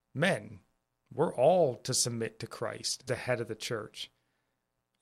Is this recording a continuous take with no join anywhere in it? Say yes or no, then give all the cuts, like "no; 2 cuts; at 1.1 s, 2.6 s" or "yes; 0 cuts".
no; 1 cut; at 3.1 s